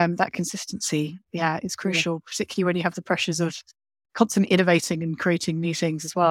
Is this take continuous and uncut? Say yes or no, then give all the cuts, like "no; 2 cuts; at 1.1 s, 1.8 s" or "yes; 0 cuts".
yes; 0 cuts